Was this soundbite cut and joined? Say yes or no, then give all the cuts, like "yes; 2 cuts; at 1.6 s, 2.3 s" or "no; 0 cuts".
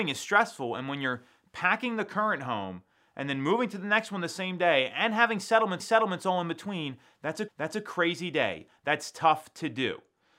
yes; 2 cuts; at 5.8 s, 7.5 s